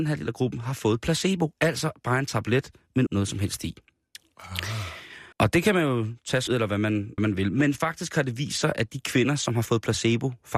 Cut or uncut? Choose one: cut